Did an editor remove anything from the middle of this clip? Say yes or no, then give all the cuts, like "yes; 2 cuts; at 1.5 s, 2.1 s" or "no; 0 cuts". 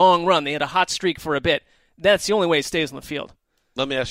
no; 0 cuts